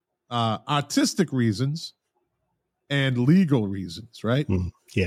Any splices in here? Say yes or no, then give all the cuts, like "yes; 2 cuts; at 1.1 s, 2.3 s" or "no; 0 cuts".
no; 0 cuts